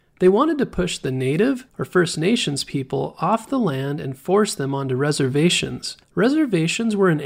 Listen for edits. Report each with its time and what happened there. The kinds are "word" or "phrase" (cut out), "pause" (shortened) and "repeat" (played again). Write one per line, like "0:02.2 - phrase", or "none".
0:01.7 - pause
0:06.0 - pause